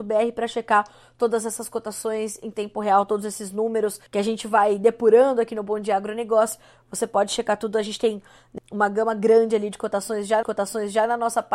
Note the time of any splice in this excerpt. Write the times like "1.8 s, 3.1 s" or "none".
4.1 s, 8.6 s, 10.4 s